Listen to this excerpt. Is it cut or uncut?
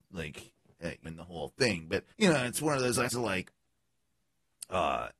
cut